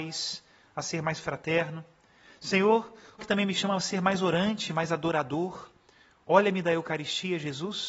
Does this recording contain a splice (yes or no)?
yes